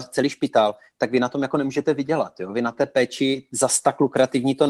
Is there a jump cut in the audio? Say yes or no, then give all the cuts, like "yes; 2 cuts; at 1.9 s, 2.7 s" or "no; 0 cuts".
no; 0 cuts